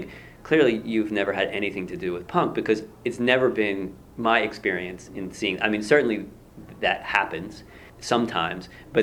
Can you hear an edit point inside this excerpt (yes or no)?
yes